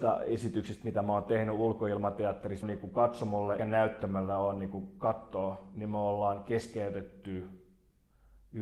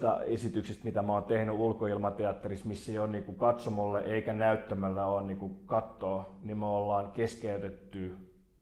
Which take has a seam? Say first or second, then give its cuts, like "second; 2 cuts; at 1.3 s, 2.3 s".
first; 2 cuts; at 2.6 s, 3.6 s